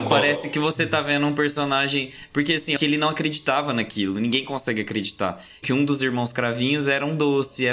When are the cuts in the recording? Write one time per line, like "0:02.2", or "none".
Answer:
0:02.8
0:05.6